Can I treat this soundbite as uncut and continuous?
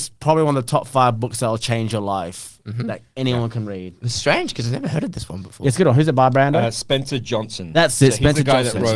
yes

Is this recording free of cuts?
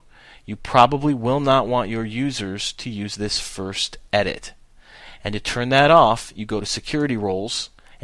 yes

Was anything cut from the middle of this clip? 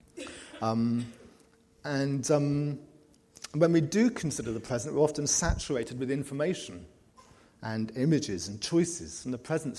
no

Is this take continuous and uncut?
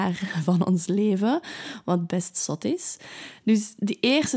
yes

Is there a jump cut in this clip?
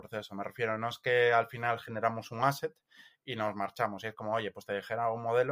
no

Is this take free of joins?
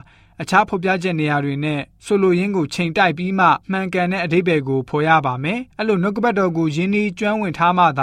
no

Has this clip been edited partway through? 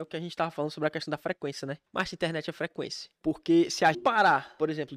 yes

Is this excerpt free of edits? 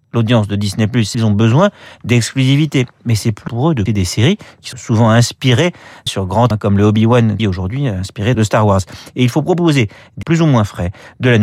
no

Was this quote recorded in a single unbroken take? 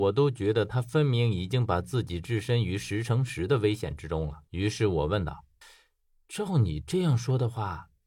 no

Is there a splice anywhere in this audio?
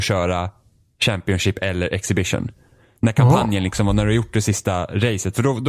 no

